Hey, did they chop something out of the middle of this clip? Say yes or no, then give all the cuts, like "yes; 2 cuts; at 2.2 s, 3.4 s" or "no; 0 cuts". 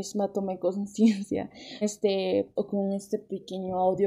yes; 2 cuts; at 1.8 s, 2.6 s